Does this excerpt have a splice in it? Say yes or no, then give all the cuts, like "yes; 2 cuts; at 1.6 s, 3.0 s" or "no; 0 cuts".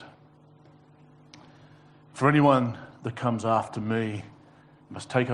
no; 0 cuts